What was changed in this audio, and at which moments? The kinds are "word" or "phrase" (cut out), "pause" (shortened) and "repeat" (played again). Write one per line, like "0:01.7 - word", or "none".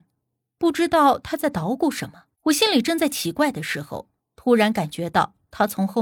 0:02.3 - pause
0:04.2 - pause